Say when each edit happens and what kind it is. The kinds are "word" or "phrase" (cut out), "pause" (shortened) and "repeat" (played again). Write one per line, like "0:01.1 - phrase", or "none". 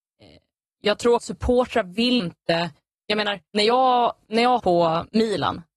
0:01.2 - word
0:02.2 - word
0:03.5 - pause
0:04.6 - word

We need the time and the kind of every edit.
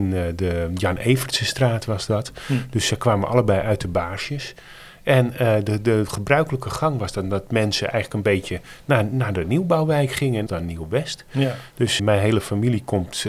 0:10.5 - phrase
0:12.0 - word

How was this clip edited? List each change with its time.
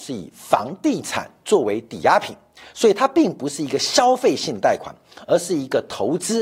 none

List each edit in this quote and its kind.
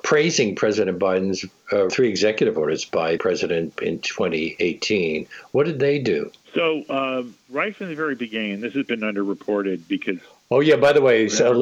0:01.9 - phrase
0:03.2 - word
0:03.8 - word
0:06.4 - pause

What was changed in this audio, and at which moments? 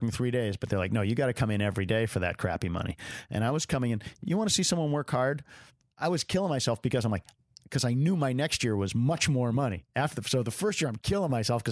none

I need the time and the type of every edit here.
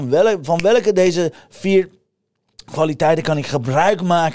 none

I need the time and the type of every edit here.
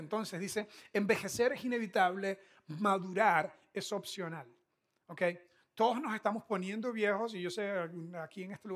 none

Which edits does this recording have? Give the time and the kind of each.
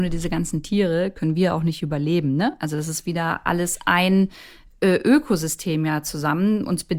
none

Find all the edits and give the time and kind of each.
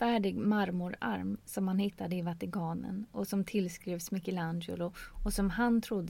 none

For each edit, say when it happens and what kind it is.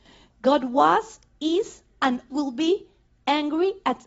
0:02.3 - word

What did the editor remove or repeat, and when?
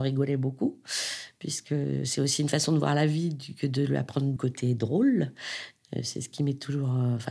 0:04.4 - word

